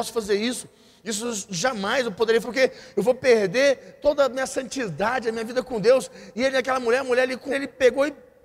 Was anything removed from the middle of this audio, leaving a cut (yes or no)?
yes